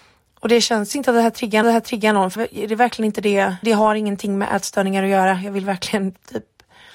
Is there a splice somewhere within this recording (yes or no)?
yes